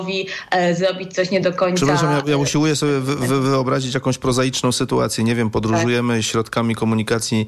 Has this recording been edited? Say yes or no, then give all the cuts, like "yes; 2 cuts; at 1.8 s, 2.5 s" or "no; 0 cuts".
no; 0 cuts